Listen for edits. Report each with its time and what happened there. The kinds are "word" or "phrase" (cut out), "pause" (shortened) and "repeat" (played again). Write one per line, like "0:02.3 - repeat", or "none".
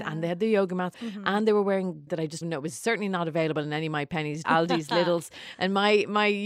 0:00.9 - phrase
0:02.1 - word
0:02.4 - phrase
0:04.4 - word